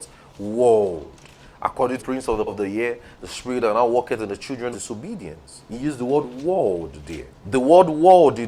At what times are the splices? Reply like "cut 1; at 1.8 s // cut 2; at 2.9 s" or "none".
cut 1; at 2.0 s // cut 2; at 2.5 s // cut 3; at 4.7 s // cut 4; at 7.4 s